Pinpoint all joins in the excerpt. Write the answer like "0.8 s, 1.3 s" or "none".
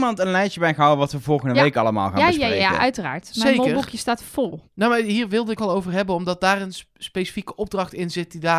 4.7 s, 5.6 s